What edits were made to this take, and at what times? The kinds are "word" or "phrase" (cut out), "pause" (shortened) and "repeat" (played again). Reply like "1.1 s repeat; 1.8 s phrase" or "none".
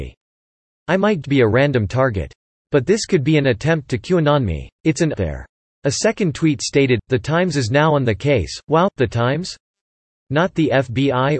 1.2 s word; 4.8 s pause; 5.1 s phrase